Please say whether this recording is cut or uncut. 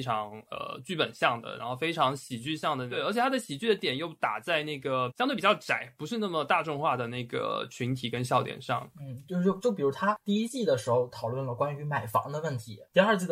uncut